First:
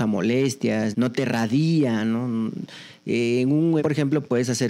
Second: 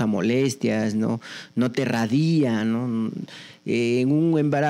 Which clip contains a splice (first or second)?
first